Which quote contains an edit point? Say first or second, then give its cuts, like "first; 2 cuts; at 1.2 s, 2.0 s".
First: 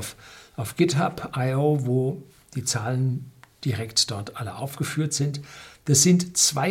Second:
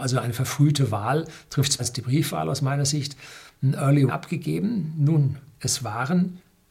second; 2 cuts; at 1.8 s, 4.1 s